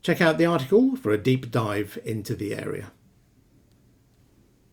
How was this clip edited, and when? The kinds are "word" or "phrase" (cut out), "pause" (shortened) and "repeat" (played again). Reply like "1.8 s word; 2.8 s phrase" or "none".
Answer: none